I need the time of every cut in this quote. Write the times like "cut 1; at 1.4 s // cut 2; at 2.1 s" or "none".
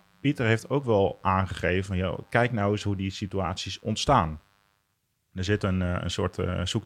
none